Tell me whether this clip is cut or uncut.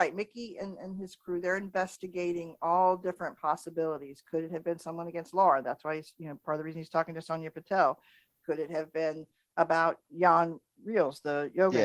uncut